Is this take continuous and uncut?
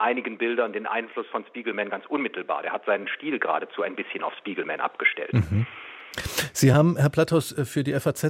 yes; 0 cuts

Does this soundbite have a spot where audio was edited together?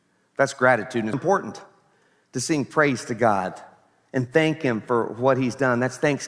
yes; 1 cut; at 1.1 s

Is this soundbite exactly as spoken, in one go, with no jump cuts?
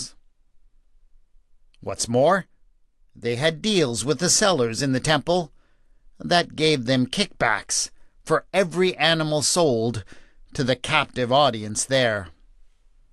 yes; 0 cuts

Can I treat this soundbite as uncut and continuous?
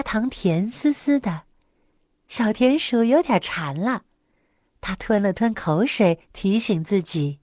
yes; 0 cuts

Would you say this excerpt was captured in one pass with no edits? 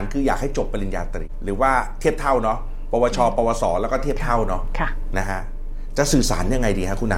yes; 0 cuts

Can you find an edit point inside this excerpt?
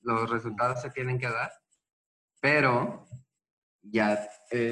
no; 0 cuts

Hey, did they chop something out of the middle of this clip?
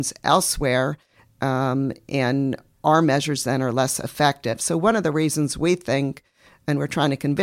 no; 0 cuts

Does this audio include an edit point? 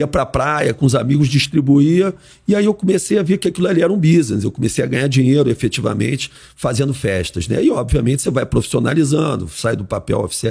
no; 0 cuts

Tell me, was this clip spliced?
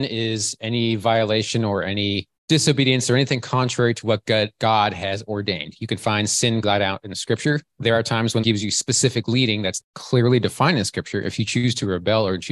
yes; 5 cuts; at 2.4 s, 6.6 s, 7.7 s, 8.4 s, 9.8 s

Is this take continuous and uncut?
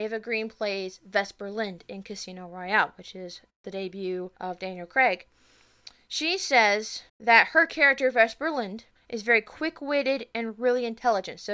no; 3 cuts; at 4.4 s, 7.1 s, 9.0 s

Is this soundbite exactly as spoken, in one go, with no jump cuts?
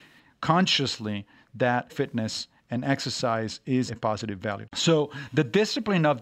no; 2 cuts; at 1.9 s, 3.9 s

